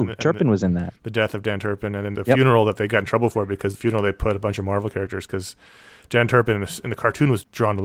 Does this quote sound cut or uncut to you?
cut